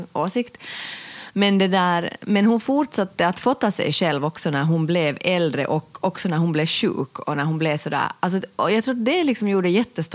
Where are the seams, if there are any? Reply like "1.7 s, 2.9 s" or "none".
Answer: none